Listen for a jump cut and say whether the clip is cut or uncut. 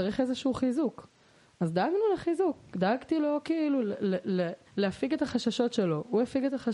cut